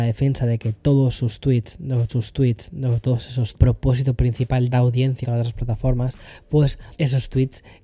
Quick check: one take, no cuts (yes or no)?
no